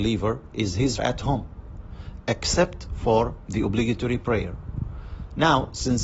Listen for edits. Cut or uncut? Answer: cut